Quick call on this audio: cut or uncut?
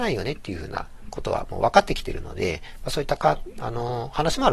uncut